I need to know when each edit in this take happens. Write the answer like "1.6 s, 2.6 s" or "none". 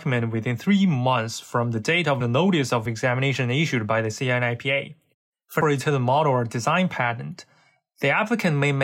2.2 s, 2.9 s, 5.1 s, 5.6 s